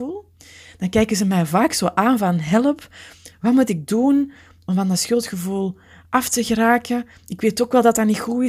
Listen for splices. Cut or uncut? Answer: uncut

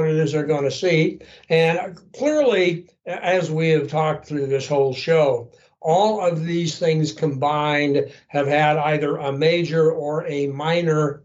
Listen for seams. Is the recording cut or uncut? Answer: uncut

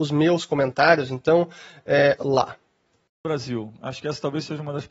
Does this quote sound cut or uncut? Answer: cut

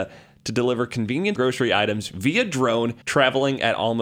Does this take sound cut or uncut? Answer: cut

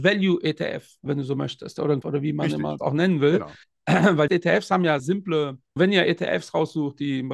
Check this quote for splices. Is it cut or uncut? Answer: cut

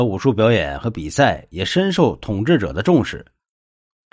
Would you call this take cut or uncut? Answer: uncut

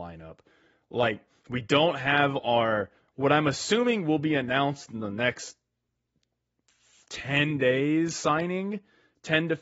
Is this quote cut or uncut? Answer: uncut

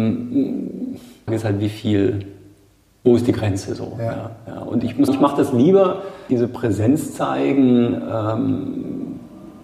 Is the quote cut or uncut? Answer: cut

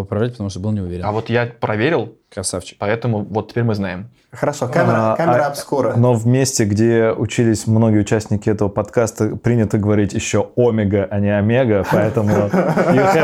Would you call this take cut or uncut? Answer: uncut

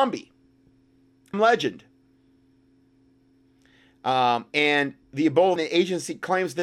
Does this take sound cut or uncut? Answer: cut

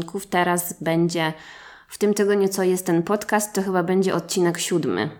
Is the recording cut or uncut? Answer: uncut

